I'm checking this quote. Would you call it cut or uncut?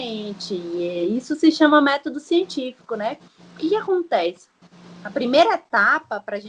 uncut